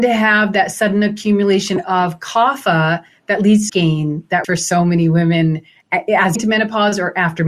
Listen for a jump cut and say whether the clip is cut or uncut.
cut